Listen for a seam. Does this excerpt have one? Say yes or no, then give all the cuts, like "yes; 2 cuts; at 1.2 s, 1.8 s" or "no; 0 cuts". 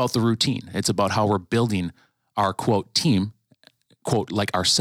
no; 0 cuts